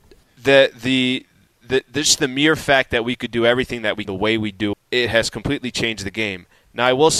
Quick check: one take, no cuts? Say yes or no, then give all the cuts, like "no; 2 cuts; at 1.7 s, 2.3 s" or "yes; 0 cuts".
no; 2 cuts; at 4.0 s, 4.7 s